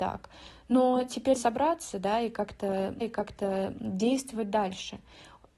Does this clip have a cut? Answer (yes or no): yes